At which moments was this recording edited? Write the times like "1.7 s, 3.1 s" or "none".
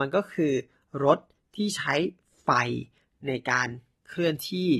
none

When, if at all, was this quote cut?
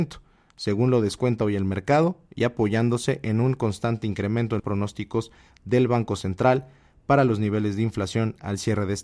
4.6 s

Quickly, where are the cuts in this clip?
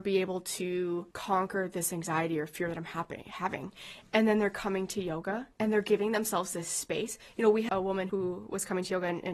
1.1 s, 5.5 s, 7.7 s, 8.1 s

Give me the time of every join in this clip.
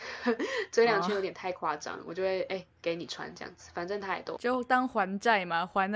2.7 s, 4.4 s

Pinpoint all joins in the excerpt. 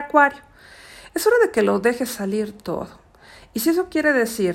none

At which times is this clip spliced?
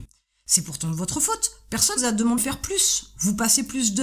2.0 s, 2.4 s

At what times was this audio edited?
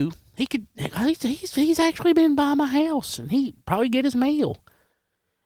none

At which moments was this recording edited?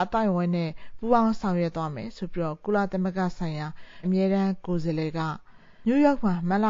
4.0 s

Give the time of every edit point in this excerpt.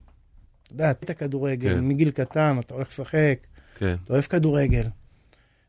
1.0 s

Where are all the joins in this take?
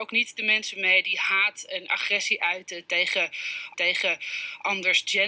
3.7 s

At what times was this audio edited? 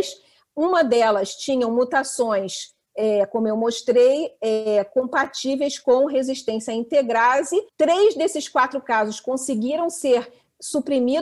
7.7 s

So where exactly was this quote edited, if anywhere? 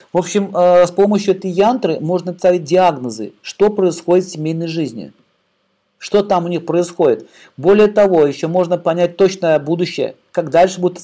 none

